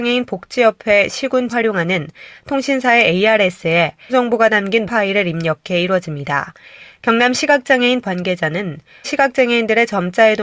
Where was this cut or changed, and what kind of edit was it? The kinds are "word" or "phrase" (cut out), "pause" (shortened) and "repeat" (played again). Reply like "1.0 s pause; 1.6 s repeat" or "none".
1.5 s word; 4.1 s word; 4.9 s word; 8.0 s word; 9.0 s word